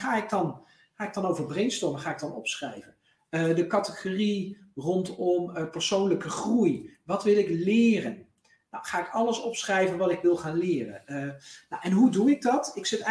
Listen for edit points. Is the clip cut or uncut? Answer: uncut